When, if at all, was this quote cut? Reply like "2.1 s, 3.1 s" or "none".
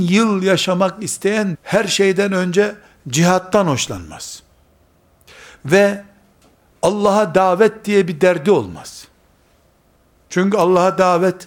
1.5 s